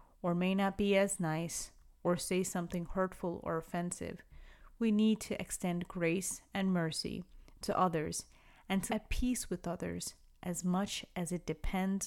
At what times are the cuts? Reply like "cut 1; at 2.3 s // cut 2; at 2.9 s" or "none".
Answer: cut 1; at 8.9 s